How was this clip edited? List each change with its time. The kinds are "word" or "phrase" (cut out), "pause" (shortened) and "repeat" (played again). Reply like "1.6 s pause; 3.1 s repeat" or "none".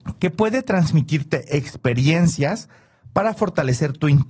none